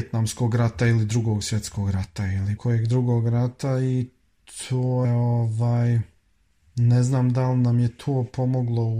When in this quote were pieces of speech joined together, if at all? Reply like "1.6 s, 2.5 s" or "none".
2.6 s, 5.0 s